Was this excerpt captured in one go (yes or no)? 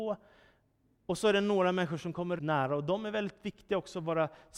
no